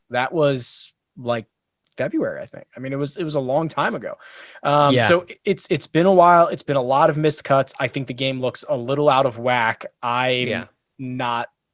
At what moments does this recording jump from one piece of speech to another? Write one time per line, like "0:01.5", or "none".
none

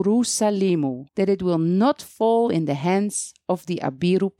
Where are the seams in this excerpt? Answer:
0:01.1

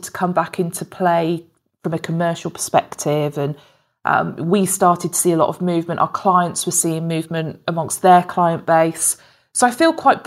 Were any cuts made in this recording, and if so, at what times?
none

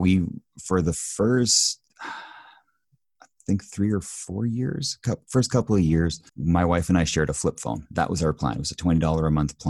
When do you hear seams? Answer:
0:01.9
0:06.3

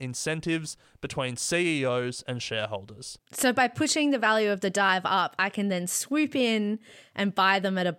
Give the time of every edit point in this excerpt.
none

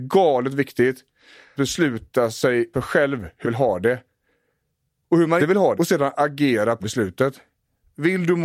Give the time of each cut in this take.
0:01.6
0:02.7
0:03.4
0:05.4
0:05.8
0:06.8

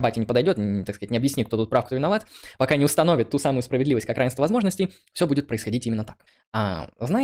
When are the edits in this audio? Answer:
0:06.3

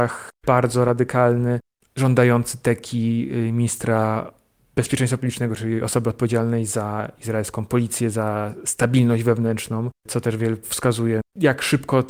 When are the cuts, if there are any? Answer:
0:10.6

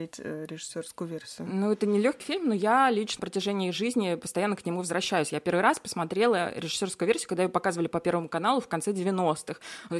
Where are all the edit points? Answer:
0:02.2
0:03.2

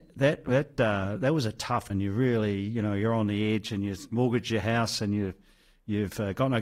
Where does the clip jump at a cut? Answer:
0:01.9

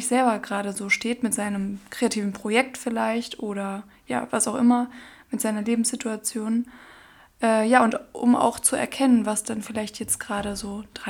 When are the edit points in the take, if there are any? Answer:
none

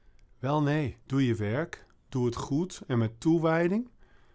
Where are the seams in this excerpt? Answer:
0:01.0

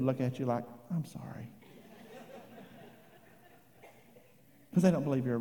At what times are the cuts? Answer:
0:01.1

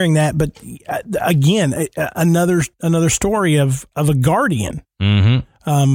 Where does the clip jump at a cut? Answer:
none

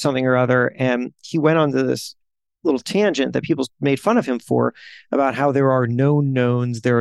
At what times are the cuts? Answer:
none

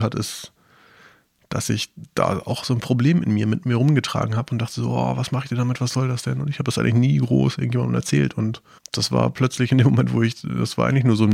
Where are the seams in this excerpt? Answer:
0:08.8

